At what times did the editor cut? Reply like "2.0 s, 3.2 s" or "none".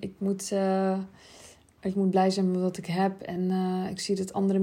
none